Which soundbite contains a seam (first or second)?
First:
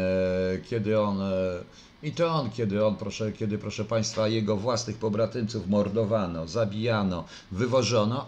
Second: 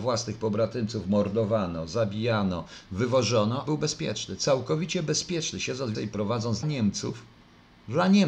second